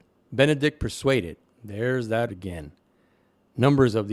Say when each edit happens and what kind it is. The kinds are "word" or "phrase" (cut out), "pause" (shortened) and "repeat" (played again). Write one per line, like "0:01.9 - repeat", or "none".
0:01.4 - word
0:02.3 - word